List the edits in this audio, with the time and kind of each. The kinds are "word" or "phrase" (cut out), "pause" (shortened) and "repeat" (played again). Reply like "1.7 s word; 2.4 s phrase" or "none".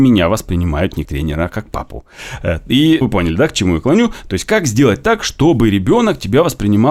1.0 s word; 3.0 s word